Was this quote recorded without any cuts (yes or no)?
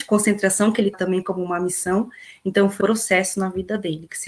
no